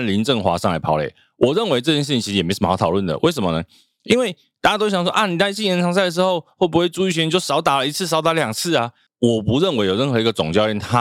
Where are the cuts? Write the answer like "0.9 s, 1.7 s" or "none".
none